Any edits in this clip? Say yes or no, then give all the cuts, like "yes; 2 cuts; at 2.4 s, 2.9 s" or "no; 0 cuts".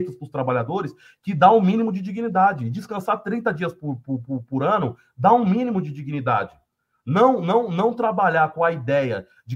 no; 0 cuts